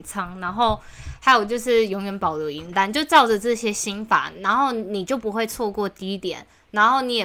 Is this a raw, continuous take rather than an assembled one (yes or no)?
yes